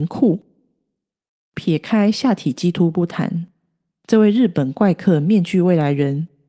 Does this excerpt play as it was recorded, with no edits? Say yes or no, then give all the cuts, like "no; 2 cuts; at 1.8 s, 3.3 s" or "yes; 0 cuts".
yes; 0 cuts